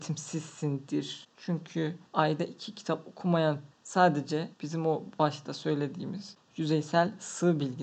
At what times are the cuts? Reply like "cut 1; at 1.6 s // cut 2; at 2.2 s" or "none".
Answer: cut 1; at 2.1 s // cut 2; at 3.7 s // cut 3; at 4.5 s